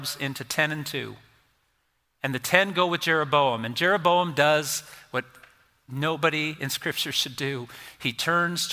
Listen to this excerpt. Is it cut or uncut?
uncut